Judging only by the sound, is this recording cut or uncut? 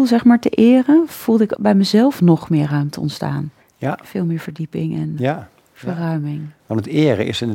cut